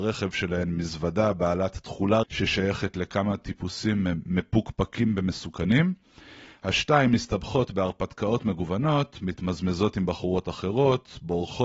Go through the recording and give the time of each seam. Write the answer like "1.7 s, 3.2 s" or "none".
2.2 s